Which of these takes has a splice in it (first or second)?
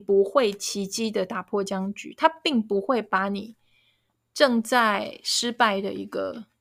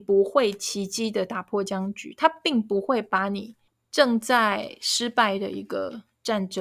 second